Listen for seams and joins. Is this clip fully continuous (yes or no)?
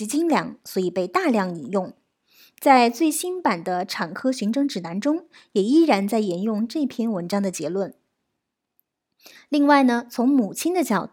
yes